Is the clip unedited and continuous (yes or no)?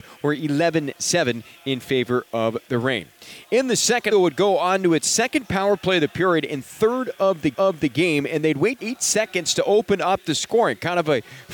no